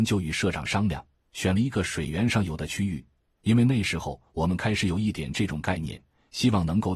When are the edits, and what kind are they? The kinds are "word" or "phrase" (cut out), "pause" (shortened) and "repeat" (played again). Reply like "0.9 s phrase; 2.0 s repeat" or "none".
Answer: none

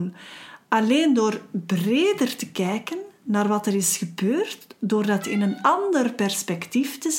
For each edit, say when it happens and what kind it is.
none

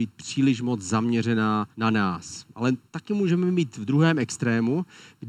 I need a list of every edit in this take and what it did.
1.7 s pause; 2.9 s pause

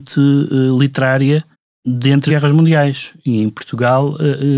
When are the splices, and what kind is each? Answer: 1.5 s pause; 2.3 s phrase

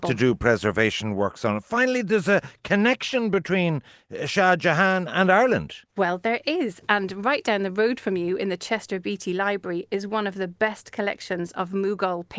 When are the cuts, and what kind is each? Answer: 5.9 s pause

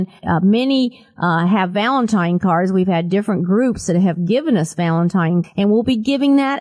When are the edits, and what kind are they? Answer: 5.4 s word

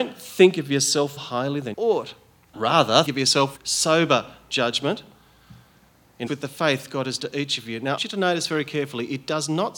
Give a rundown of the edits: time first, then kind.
1.2 s word; 1.7 s word; 2.5 s word; 3.1 s word; 3.6 s word; 6.3 s word; 7.2 s word; 8.0 s word

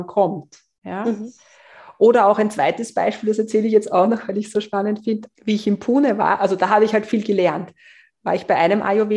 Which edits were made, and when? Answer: 5.3 s pause

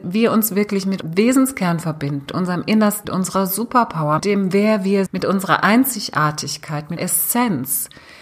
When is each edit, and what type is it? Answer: 1.0 s word; 2.3 s word; 3.0 s word; 4.2 s word; 5.1 s word; 7.0 s word

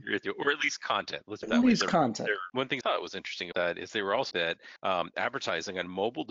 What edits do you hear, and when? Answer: 1.4 s word; 2.8 s word; 3.5 s word; 4.3 s word; 4.8 s pause

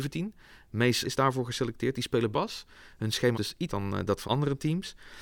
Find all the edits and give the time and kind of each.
1.0 s word; 2.3 s word; 3.3 s word; 3.7 s word; 4.2 s word

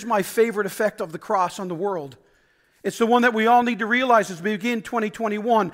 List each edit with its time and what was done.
none

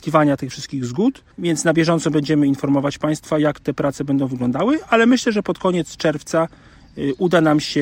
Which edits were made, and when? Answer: 1.3 s pause

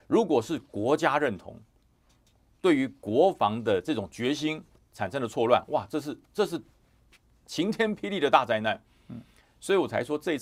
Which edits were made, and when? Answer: none

